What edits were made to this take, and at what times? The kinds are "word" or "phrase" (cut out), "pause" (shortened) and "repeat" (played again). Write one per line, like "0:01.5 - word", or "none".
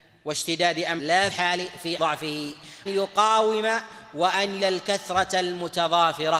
0:01.0 - word
0:01.3 - word
0:02.0 - word
0:02.9 - phrase
0:04.6 - word